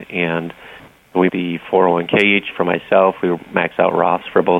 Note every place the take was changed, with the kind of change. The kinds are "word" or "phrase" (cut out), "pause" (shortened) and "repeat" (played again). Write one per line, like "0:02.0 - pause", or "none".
0:01.3 - phrase
0:02.5 - word